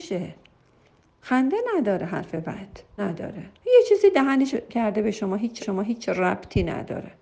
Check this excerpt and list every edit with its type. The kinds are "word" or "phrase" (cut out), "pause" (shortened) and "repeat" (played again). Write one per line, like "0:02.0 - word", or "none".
0:03.0 - word
0:03.6 - pause
0:04.5 - word
0:05.6 - repeat